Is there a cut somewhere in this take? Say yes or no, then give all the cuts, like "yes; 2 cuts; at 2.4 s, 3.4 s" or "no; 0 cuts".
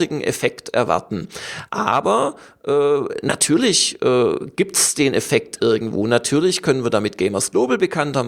no; 0 cuts